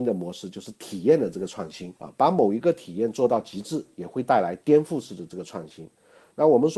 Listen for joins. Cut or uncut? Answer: cut